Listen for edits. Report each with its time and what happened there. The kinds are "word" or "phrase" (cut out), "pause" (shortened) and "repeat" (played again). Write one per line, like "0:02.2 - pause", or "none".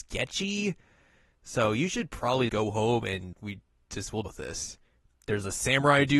0:02.5 - word
0:03.3 - word
0:04.2 - word
0:05.1 - word